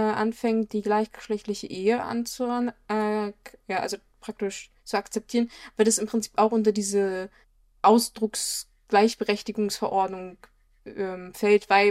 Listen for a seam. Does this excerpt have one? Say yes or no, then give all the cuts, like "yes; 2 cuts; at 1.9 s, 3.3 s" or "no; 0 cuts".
yes; 2 cuts; at 4.8 s, 7.4 s